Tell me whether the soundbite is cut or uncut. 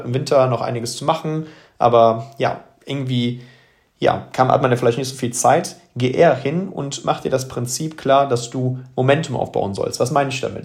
uncut